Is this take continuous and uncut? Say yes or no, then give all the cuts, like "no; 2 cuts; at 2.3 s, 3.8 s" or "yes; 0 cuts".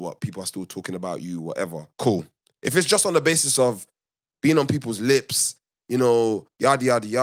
no; 1 cut; at 1.9 s